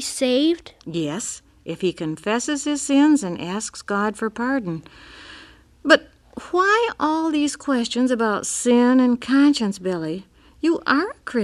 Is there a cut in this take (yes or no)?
no